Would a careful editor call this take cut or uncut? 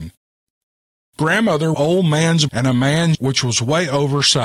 cut